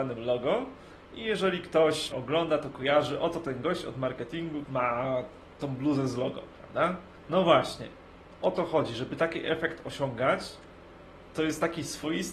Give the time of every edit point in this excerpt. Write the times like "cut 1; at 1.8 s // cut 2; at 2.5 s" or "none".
cut 1; at 2.1 s // cut 2; at 4.6 s

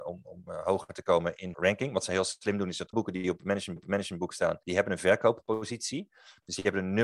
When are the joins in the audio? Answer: cut 1; at 1.5 s // cut 2; at 2.9 s // cut 3; at 3.8 s // cut 4; at 4.6 s

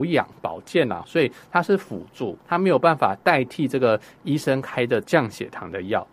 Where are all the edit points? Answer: cut 1; at 2.4 s

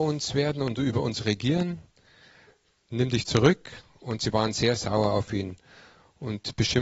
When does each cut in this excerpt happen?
none

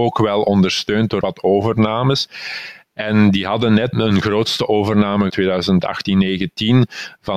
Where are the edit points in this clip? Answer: cut 1; at 1.2 s // cut 2; at 3.9 s // cut 3; at 5.3 s

